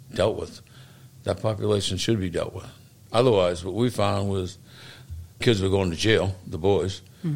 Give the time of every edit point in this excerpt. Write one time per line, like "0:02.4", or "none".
0:05.4